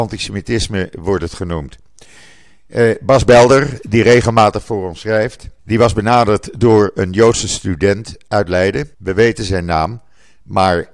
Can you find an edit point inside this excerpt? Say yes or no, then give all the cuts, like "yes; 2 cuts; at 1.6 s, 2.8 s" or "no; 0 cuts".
yes; 2 cuts; at 5.6 s, 8.9 s